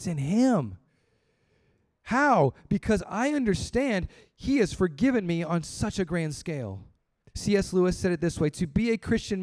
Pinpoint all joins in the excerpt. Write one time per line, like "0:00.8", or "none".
0:07.2